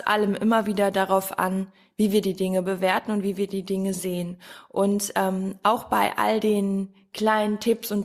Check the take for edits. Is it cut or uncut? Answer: uncut